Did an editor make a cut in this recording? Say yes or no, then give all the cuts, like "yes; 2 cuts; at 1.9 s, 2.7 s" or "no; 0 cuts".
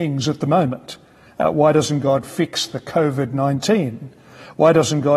no; 0 cuts